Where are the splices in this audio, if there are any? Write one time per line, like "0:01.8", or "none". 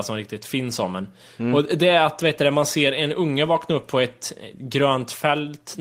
none